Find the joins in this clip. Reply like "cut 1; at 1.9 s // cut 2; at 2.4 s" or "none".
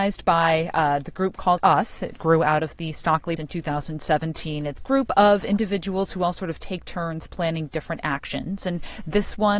cut 1; at 1.6 s // cut 2; at 3.4 s // cut 3; at 4.8 s